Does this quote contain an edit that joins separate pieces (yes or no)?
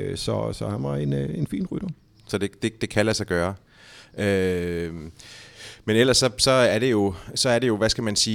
no